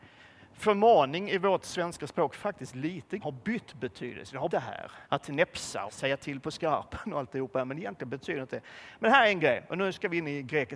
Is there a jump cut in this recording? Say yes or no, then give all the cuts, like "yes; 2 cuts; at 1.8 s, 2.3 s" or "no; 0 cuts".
yes; 4 cuts; at 3.2 s, 4.5 s, 5.0 s, 5.9 s